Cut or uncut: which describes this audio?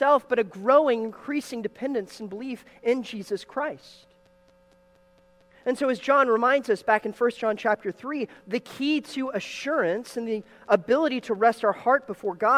uncut